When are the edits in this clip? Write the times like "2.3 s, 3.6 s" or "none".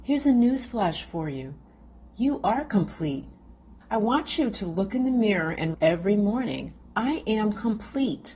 3.8 s, 5.7 s